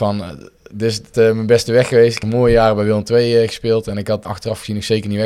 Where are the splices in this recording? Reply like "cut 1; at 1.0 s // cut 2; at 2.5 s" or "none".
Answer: cut 1; at 1.1 s // cut 2; at 2.2 s // cut 3; at 4.2 s